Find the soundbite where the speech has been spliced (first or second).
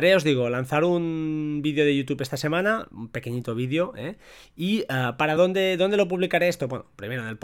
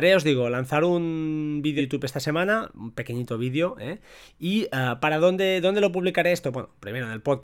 second